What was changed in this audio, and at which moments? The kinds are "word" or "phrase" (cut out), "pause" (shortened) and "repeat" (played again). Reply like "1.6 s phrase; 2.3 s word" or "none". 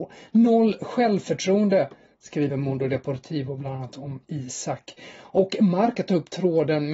none